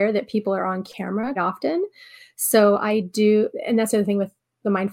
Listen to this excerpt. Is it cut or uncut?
cut